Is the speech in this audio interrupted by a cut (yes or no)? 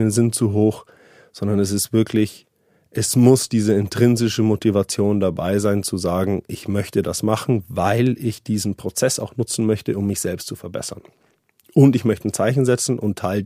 no